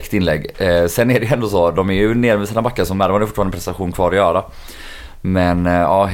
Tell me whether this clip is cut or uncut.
uncut